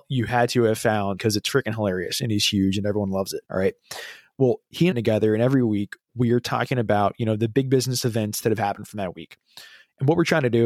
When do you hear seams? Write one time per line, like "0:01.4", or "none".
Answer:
0:01.2
0:03.4
0:04.9